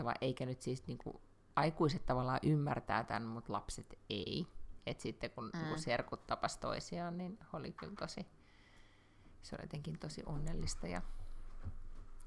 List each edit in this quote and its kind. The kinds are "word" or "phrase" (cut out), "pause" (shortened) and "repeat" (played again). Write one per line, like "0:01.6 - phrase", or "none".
none